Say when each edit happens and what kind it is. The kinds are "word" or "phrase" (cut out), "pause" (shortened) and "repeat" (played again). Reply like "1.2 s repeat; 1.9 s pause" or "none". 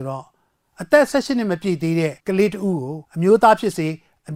2.2 s pause; 3.1 s pause